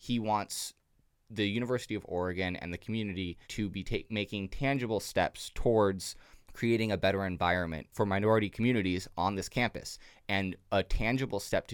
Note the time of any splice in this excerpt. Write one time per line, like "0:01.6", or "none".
0:03.4
0:06.4